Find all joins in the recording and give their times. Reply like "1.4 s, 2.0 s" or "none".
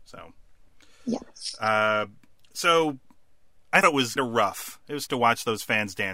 3.8 s, 4.2 s, 5.1 s